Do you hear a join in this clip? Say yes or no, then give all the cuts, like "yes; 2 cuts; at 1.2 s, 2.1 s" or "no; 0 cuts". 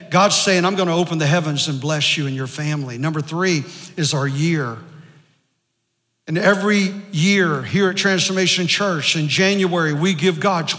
no; 0 cuts